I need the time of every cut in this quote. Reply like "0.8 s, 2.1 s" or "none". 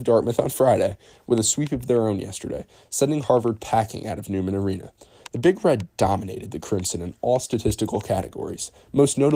none